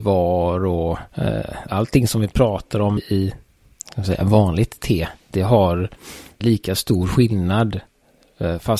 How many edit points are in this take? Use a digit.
4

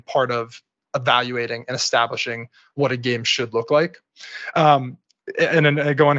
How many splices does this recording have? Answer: 0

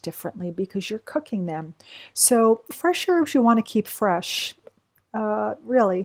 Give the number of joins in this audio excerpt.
1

